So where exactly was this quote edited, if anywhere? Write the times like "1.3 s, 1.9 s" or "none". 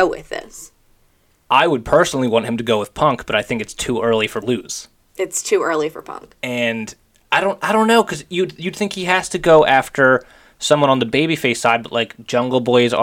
4.4 s